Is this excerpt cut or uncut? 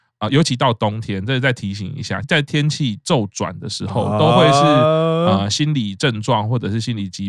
cut